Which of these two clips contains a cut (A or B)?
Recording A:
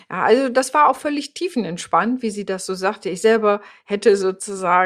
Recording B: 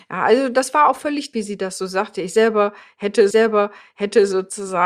B